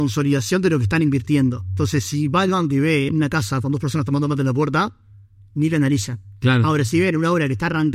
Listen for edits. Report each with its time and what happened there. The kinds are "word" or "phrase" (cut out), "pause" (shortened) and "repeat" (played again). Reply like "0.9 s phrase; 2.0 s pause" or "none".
none